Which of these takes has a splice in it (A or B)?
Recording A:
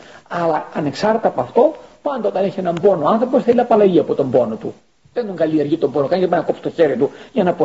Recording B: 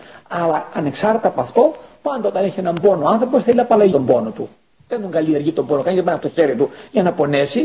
B